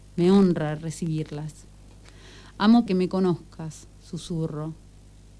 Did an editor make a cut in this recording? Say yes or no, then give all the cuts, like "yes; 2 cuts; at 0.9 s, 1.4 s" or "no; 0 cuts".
yes; 1 cut; at 2.9 s